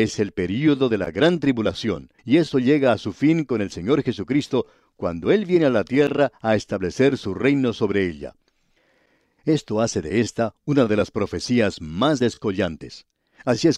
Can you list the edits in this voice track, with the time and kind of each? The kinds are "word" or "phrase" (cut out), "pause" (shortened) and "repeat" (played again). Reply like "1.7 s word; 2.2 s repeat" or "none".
2.2 s pause

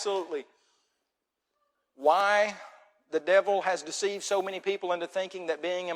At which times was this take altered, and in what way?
none

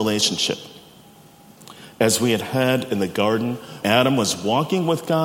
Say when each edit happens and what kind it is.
3.8 s word

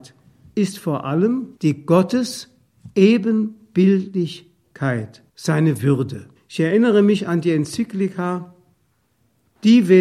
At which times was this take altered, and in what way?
1.6 s pause; 5.3 s pause; 6.4 s pause

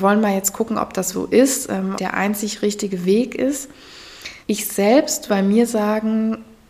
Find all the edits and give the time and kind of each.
1.1 s word; 2.0 s phrase; 4.4 s pause; 5.3 s word

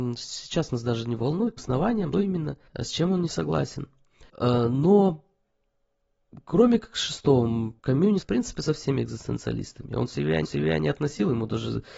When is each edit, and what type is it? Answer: 1.6 s phrase; 2.1 s word; 2.7 s pause; 4.3 s pause; 7.8 s pause; 8.2 s word; 10.4 s repeat

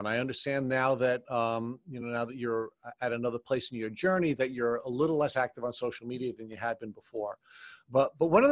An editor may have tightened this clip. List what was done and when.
none

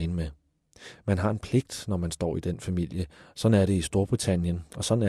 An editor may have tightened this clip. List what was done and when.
none

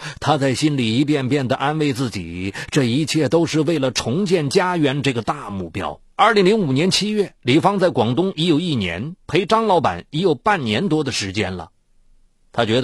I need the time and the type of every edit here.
6.1 s pause; 7.4 s pause; 9.2 s pause

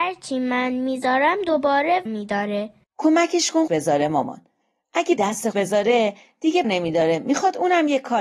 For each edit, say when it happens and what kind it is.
2.1 s word; 3.7 s word; 5.2 s word; 5.5 s word; 6.6 s word

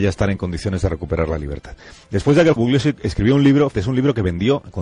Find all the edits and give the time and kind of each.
2.6 s word; 3.7 s word

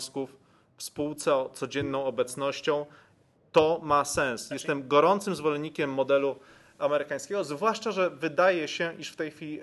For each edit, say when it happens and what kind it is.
none

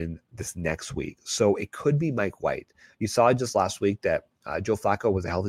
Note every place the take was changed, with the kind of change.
none

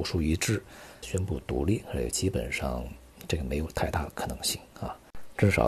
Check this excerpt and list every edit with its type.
1.0 s word

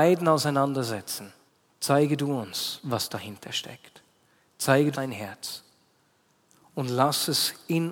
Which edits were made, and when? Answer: 1.5 s pause; 4.9 s phrase

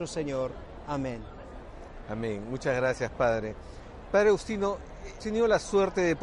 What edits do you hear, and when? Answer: 5.2 s word

